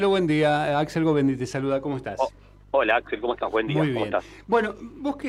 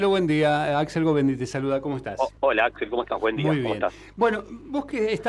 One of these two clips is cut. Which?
second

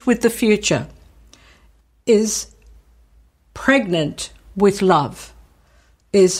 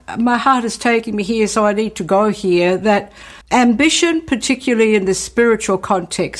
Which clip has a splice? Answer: second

